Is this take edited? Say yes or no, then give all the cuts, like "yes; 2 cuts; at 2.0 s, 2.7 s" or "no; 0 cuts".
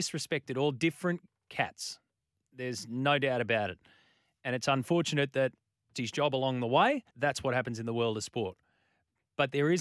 yes; 2 cuts; at 5.9 s, 7.1 s